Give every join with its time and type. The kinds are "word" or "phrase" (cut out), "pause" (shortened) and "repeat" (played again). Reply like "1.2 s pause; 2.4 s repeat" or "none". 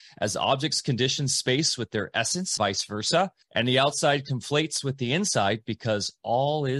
2.6 s word; 3.4 s pause